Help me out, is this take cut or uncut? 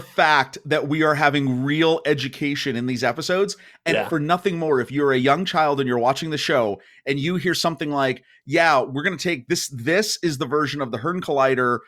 uncut